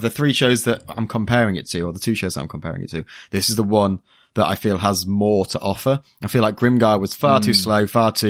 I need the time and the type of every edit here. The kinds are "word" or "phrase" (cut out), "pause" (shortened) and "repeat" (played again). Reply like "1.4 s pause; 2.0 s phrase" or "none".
none